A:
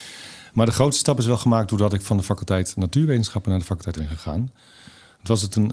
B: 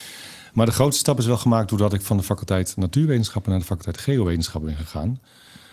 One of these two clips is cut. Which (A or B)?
A